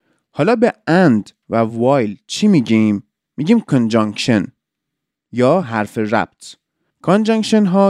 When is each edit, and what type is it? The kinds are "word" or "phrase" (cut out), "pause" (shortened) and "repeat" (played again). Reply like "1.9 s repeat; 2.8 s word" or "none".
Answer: none